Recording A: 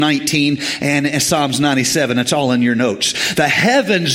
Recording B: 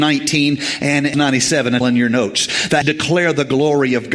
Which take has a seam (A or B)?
B